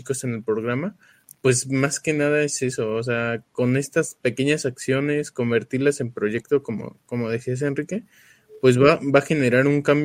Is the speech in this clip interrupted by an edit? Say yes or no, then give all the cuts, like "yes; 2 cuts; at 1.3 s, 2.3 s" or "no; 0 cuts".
no; 0 cuts